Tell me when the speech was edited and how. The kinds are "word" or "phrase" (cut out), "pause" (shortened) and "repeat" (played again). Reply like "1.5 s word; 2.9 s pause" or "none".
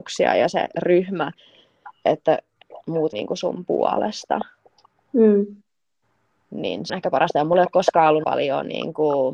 3.1 s word; 6.9 s word; 8.2 s word